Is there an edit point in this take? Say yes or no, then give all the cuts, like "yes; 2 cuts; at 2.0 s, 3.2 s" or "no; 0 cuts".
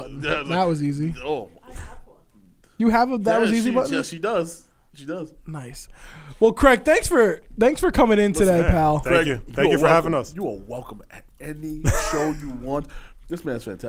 yes; 1 cut; at 5.4 s